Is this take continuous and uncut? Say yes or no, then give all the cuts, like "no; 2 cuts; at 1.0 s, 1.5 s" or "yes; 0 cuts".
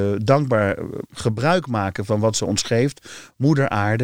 yes; 0 cuts